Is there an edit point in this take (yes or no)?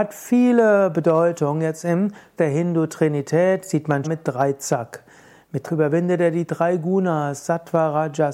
yes